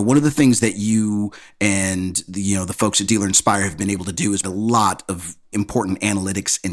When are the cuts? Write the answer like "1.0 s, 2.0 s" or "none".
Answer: 4.4 s, 5.5 s